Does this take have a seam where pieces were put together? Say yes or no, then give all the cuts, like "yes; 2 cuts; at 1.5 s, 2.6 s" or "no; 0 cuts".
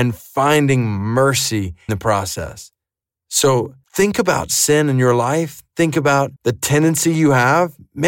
yes; 3 cuts; at 1.9 s, 3.8 s, 6.4 s